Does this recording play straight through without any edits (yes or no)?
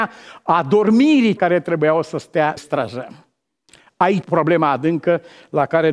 no